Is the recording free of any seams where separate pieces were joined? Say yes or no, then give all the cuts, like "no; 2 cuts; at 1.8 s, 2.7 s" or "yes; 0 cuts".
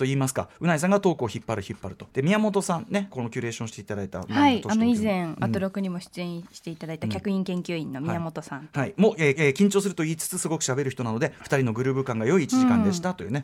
no; 3 cuts; at 2.1 s, 3.1 s, 9.3 s